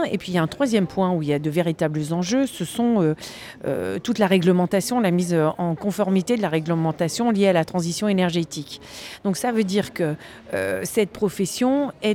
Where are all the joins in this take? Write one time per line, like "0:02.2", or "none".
none